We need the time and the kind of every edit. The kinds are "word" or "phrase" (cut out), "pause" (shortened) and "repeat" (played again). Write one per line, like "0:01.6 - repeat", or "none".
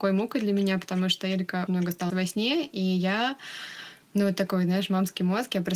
0:01.7 - word
0:02.1 - word